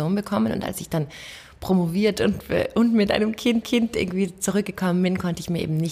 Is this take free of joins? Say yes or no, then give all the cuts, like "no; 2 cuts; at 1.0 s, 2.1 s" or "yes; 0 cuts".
no; 1 cut; at 3.6 s